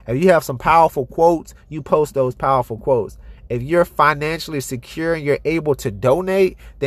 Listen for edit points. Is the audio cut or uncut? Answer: uncut